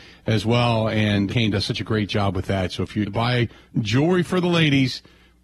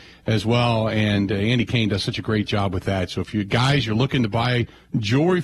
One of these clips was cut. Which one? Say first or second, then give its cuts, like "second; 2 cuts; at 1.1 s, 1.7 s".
first; 2 cuts; at 1.3 s, 3.1 s